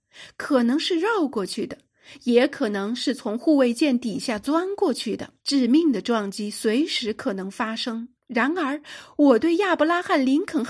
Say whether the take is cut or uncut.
cut